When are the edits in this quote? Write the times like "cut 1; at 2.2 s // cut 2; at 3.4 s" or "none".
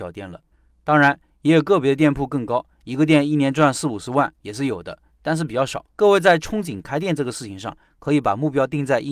cut 1; at 5.9 s